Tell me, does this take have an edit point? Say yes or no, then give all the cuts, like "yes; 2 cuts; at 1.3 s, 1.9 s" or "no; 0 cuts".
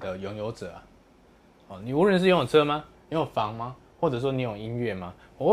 no; 0 cuts